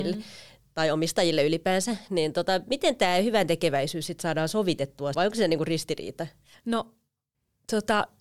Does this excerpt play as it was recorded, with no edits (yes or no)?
no